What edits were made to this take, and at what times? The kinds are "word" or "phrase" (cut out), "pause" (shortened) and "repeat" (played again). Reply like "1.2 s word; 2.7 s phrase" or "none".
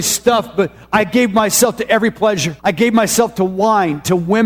2.6 s pause